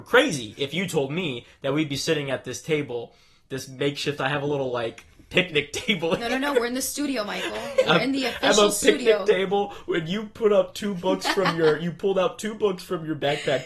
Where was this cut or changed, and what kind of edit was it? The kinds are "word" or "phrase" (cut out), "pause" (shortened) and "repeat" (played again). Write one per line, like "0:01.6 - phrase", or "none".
none